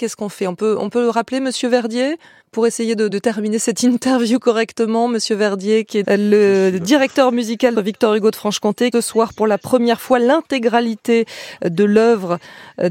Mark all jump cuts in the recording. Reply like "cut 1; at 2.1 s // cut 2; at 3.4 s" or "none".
cut 1; at 2.4 s // cut 2; at 3.1 s // cut 3; at 6.0 s // cut 4; at 7.7 s // cut 5; at 8.9 s